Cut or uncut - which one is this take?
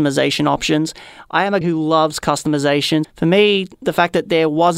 cut